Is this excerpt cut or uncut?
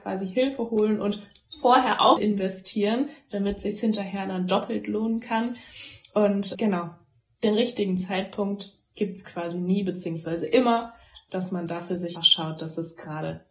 cut